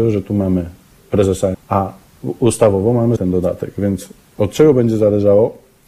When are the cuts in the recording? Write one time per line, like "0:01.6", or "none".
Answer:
0:01.0
0:01.5
0:03.2